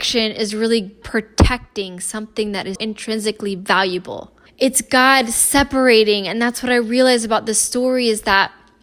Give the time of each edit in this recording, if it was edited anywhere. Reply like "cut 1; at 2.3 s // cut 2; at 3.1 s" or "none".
cut 1; at 1.0 s // cut 2; at 2.7 s // cut 3; at 4.5 s